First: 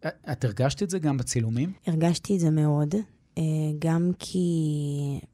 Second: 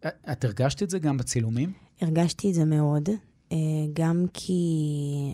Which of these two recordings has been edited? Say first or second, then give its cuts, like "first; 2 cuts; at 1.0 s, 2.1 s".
first; 1 cut; at 1.8 s